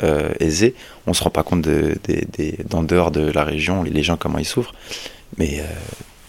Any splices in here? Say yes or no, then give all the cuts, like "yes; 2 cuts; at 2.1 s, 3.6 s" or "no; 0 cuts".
yes; 1 cut; at 3.8 s